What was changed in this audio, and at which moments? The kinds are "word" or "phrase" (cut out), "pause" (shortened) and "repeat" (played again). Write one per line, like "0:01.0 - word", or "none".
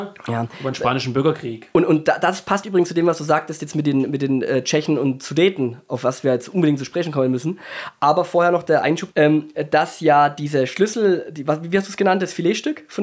0:09.1 - word